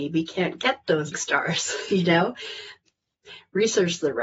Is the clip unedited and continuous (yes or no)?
no